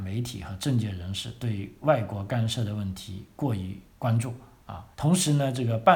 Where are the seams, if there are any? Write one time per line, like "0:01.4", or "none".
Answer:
0:03.9
0:04.9